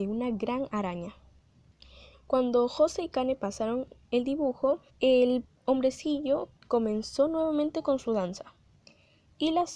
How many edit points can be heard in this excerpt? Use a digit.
2